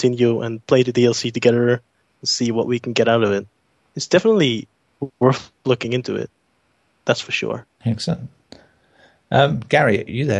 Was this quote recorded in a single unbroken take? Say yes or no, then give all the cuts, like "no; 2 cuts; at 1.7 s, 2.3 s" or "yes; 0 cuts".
yes; 0 cuts